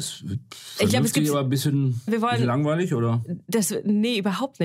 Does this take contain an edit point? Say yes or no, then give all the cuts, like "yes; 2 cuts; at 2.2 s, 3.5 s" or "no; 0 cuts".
yes; 1 cut; at 2.1 s